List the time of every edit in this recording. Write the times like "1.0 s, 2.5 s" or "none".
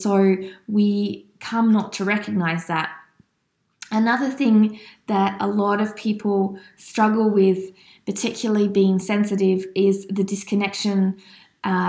none